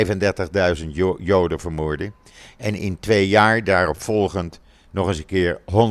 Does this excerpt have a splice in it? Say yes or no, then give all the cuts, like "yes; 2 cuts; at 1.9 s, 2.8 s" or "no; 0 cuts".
no; 0 cuts